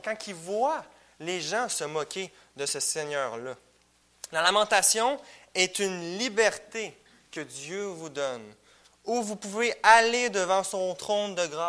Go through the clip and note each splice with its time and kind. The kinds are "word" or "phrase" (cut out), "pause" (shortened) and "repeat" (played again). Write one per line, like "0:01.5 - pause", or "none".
none